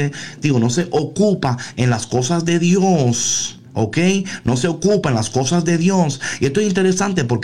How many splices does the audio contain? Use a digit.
1